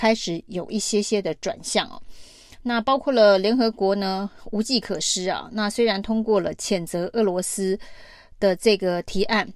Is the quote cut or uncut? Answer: uncut